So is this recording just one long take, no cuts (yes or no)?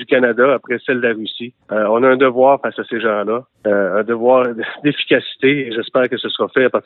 no